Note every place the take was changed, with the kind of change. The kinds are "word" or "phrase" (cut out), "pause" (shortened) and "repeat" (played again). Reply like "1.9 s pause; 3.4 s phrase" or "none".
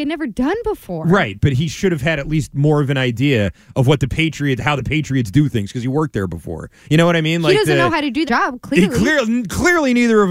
8.3 s word